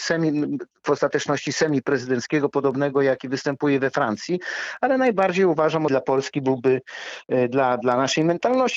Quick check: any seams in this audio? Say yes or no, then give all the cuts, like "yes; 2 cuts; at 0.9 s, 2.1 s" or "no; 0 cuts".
yes; 1 cut; at 5.9 s